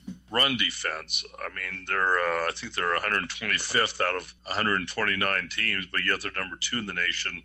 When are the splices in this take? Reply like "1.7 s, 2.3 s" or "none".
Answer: 4.4 s